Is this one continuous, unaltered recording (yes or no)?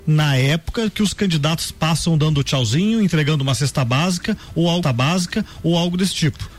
no